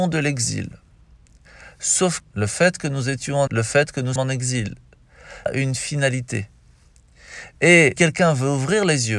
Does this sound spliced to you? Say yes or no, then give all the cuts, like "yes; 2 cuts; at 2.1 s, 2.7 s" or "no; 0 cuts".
yes; 5 cuts; at 2.2 s, 3.5 s, 4.2 s, 5.5 s, 8.0 s